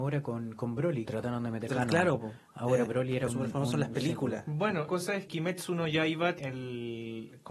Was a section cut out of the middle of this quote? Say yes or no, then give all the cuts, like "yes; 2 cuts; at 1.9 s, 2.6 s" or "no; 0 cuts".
yes; 7 cuts; at 1.0 s, 1.7 s, 2.9 s, 3.3 s, 4.9 s, 5.3 s, 6.4 s